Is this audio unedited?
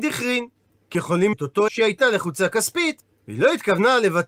no; 3 cuts; at 0.9 s, 1.3 s, 1.7 s

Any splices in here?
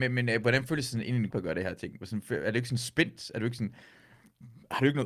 yes; 1 cut; at 1.3 s

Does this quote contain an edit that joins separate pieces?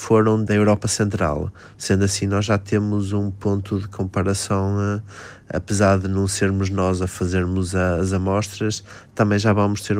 no; 0 cuts

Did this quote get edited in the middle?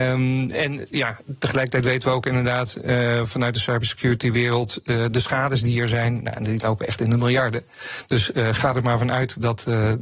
no; 0 cuts

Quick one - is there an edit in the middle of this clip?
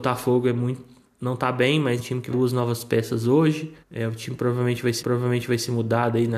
yes; 4 cuts; at 2.0 s, 2.3 s, 3.8 s, 5.0 s

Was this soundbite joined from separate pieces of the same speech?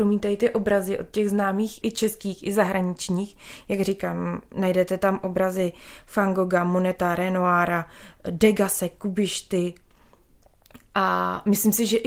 yes; 1 cut; at 1.8 s

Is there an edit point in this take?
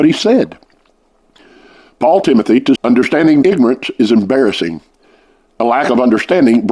yes; 3 cuts; at 2.2 s, 2.7 s, 3.4 s

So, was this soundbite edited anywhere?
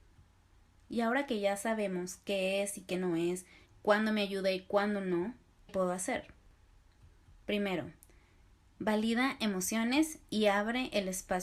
yes; 2 cuts; at 3.7 s, 5.7 s

